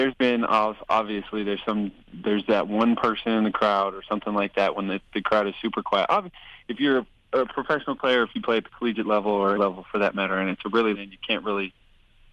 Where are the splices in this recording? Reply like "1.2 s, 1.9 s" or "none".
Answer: 9.6 s, 10.9 s